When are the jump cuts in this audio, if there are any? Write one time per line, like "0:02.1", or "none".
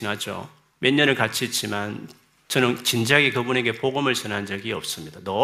none